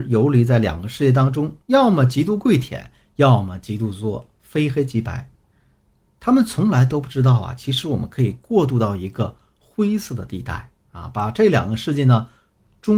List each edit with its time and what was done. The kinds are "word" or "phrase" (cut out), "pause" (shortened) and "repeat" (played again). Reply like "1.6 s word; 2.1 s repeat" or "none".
1.6 s pause